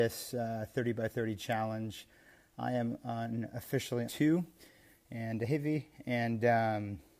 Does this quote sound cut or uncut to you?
cut